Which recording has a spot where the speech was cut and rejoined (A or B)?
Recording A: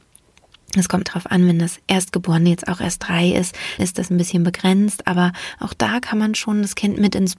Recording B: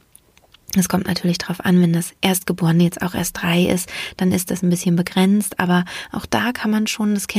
A